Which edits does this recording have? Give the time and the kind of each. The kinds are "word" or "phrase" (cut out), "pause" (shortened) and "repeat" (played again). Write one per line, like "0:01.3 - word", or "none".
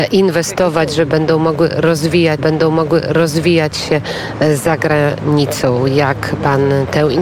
0:02.4 - repeat